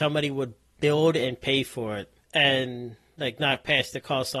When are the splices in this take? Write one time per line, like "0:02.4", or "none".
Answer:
0:02.2